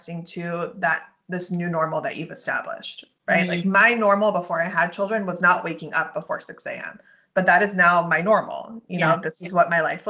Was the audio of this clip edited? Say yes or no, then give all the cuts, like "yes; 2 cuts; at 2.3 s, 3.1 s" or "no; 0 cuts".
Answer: no; 0 cuts